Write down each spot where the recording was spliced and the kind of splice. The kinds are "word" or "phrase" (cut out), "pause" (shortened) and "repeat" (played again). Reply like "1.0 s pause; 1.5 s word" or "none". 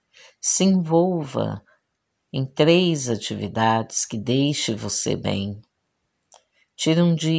none